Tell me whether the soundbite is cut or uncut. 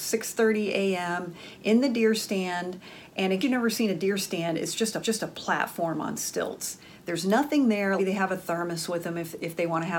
cut